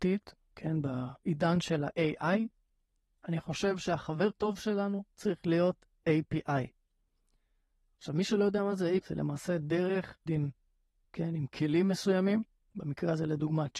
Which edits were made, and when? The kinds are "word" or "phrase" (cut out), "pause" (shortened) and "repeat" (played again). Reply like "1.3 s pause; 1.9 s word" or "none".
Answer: 4.3 s word; 9.0 s word; 10.3 s word; 11.0 s word